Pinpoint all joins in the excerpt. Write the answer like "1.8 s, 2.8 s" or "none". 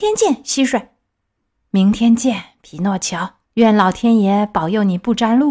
1.4 s, 3.5 s